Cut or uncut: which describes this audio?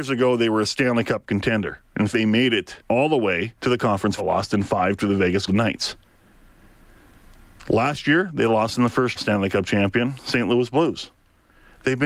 cut